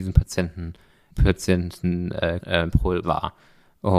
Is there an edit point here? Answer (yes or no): yes